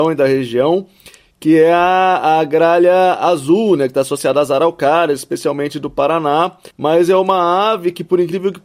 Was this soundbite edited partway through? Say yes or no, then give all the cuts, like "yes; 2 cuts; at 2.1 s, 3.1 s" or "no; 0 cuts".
yes; 1 cut; at 6.7 s